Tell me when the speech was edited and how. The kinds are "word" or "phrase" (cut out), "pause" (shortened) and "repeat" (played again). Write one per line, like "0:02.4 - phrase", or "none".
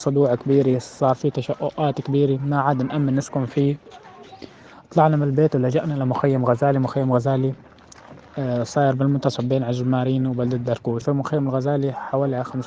0:11.0 - word

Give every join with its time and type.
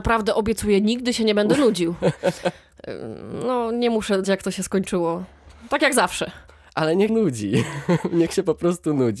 0:04.2 - word
0:06.5 - pause
0:07.1 - word

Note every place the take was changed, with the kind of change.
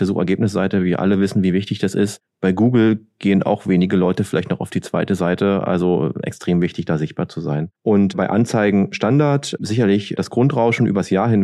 0:07.7 - pause

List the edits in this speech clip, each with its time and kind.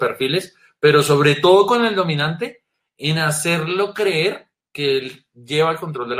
none

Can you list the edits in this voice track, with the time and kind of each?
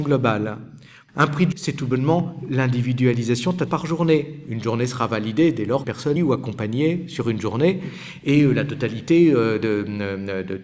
0:01.5 - word
0:03.7 - word
0:05.8 - word
0:06.2 - phrase

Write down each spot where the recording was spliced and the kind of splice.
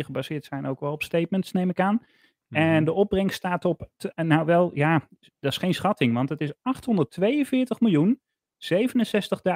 none

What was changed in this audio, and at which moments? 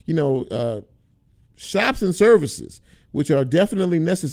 none

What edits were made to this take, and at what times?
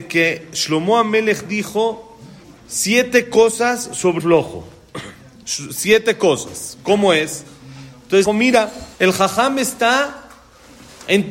0:02.4 - pause
0:04.2 - word
0:08.3 - phrase
0:08.9 - pause

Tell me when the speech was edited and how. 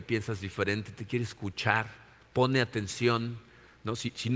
none

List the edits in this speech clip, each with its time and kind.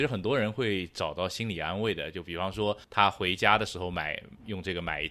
0:02.8 - pause

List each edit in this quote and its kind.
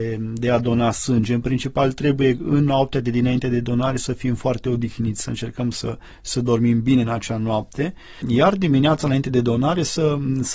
none

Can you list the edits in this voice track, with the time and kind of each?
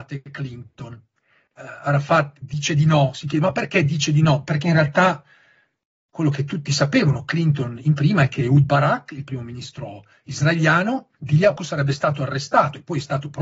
0:11.1 - pause
0:11.6 - word

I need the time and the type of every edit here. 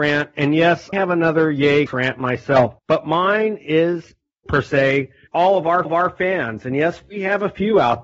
0:00.9 - word
0:01.9 - word
0:02.8 - pause
0:04.5 - phrase
0:05.3 - word
0:05.9 - repeat

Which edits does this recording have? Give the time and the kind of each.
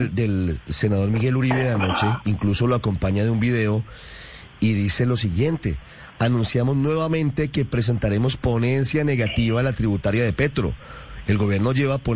none

